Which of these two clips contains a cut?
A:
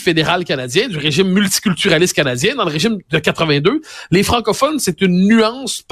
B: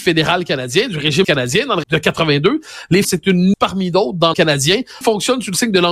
B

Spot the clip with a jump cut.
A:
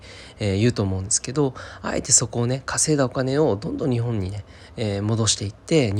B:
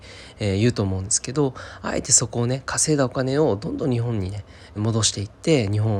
B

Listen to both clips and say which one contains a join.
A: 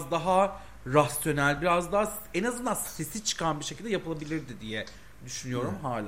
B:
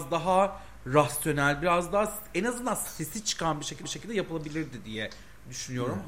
B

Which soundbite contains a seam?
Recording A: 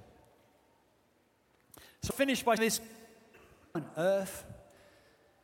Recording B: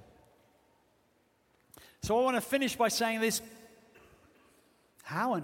A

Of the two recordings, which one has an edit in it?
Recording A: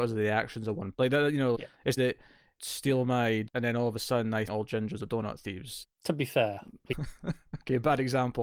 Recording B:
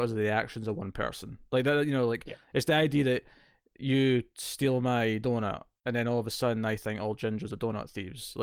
A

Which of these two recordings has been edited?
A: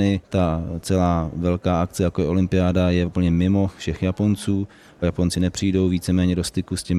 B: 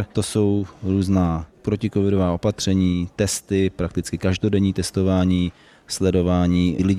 A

